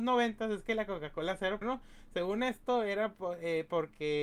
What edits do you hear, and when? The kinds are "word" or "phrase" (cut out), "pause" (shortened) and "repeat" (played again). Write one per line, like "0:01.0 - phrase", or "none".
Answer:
0:01.6 - phrase

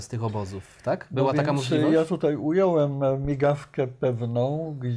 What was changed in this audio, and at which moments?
none

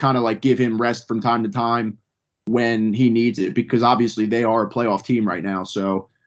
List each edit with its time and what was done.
none

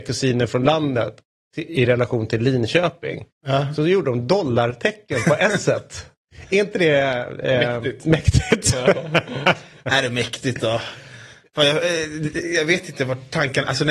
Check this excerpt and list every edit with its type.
none

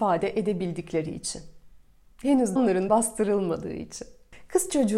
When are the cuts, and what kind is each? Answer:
0:02.6 - word
0:02.9 - word

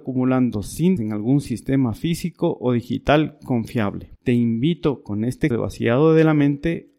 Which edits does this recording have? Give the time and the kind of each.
0:01.0 - word
0:04.2 - pause
0:05.5 - word

